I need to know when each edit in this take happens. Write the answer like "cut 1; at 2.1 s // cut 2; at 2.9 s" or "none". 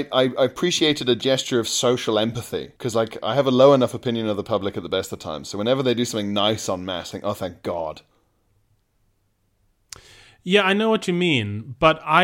cut 1; at 2.8 s // cut 2; at 7.1 s